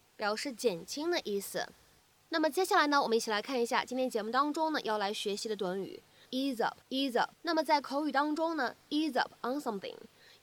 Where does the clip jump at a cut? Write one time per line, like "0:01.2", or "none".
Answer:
0:06.3
0:06.8
0:07.3